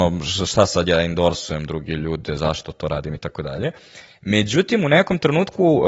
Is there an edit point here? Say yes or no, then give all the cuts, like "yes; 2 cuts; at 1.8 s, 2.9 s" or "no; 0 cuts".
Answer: no; 0 cuts